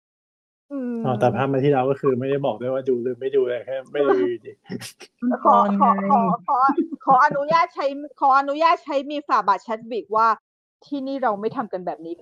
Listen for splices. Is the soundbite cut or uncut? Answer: uncut